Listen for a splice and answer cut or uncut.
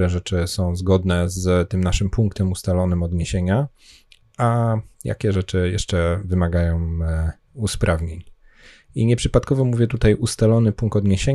uncut